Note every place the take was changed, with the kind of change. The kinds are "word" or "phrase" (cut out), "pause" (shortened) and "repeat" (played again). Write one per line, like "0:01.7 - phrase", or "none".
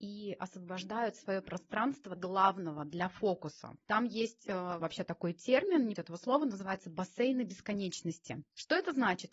0:02.2 - word
0:04.8 - word
0:06.0 - word